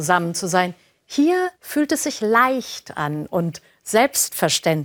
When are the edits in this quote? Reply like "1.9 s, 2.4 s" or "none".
1.5 s